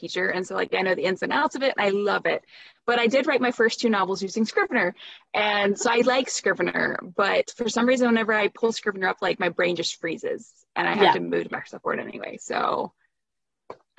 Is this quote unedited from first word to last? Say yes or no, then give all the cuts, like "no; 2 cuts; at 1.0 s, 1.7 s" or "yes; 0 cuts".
yes; 0 cuts